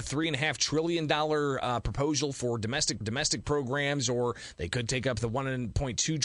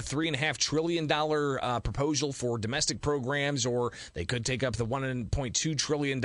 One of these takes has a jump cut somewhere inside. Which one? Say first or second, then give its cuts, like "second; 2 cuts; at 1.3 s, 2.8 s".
first; 1 cut; at 3.0 s